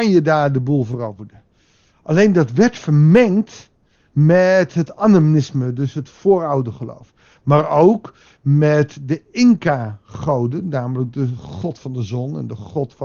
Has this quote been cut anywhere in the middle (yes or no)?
no